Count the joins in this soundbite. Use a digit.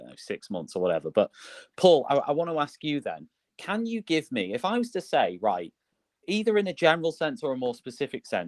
1